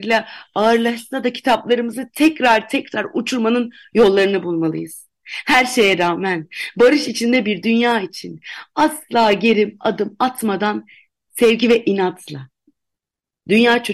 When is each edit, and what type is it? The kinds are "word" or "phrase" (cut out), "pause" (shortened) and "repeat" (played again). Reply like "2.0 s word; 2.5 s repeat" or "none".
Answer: none